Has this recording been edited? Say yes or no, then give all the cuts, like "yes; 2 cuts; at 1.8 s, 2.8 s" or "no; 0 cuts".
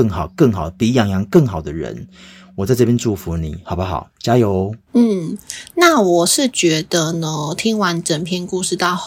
no; 0 cuts